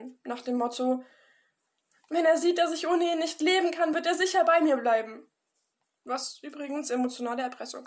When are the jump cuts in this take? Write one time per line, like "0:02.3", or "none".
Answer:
none